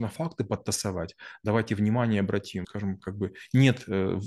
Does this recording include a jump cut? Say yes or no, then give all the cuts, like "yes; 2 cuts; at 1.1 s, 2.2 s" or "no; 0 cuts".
yes; 1 cut; at 2.6 s